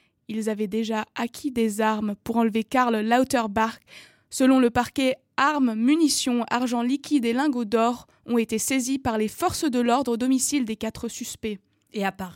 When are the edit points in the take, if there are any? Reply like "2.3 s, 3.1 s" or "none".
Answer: none